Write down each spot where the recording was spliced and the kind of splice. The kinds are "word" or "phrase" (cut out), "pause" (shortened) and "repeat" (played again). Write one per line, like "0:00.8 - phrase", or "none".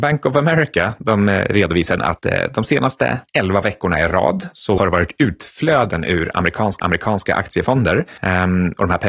0:02.0 - word
0:04.8 - word
0:06.8 - repeat